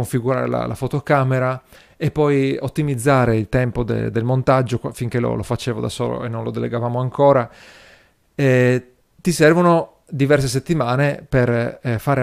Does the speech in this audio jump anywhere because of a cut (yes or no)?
no